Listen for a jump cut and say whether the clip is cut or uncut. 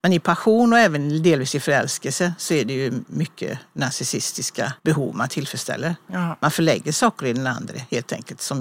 cut